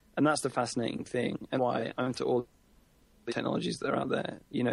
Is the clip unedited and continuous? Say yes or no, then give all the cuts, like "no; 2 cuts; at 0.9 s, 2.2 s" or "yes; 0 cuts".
no; 3 cuts; at 1.6 s, 2.1 s, 3.3 s